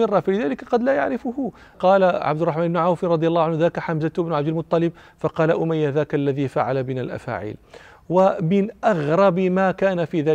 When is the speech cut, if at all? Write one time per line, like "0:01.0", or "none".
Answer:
none